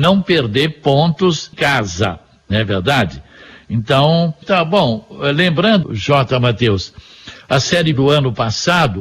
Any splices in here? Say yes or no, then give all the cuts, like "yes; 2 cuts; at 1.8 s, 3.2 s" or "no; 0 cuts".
yes; 4 cuts; at 1.5 s, 4.4 s, 5.8 s, 7.9 s